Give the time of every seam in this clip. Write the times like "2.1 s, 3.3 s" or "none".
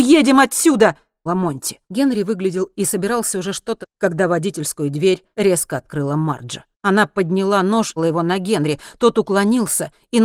1.3 s, 1.8 s, 2.7 s, 3.8 s, 5.3 s, 6.7 s, 8.0 s